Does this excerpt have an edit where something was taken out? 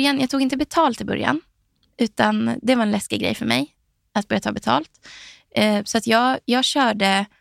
no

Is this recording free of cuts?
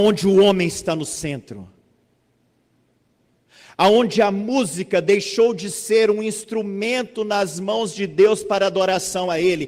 yes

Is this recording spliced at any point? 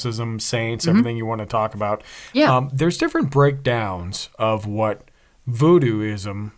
no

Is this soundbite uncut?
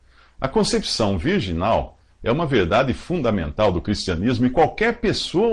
yes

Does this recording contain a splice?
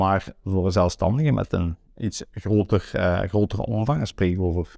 no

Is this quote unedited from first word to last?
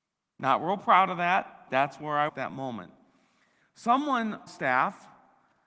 no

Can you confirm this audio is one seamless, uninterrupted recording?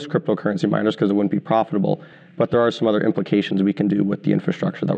yes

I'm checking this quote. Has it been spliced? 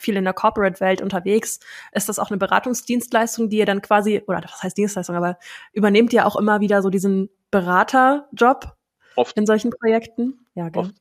no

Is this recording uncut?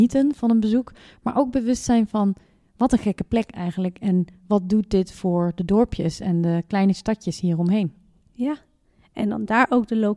yes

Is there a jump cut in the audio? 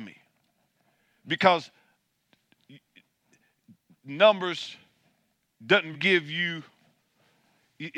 yes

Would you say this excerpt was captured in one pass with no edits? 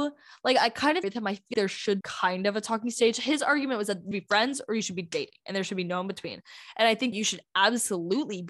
no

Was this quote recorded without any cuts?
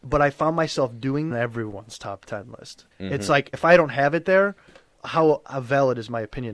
no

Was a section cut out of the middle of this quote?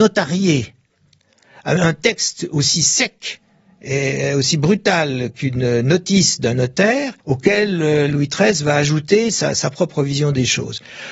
yes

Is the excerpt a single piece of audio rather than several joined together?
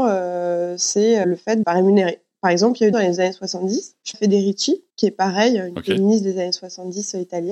no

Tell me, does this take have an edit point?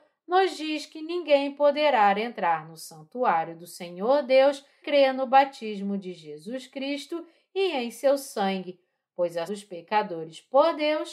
yes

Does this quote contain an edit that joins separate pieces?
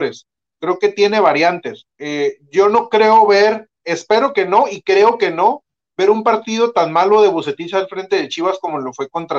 yes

